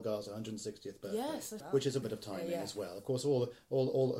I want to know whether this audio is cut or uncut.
cut